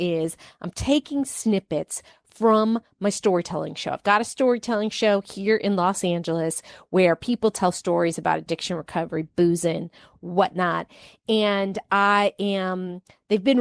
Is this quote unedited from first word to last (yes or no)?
yes